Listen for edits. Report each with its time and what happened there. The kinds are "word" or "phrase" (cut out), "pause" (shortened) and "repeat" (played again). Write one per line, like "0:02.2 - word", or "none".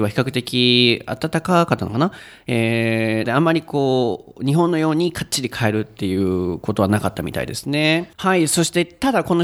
0:03.2 - phrase
0:08.1 - pause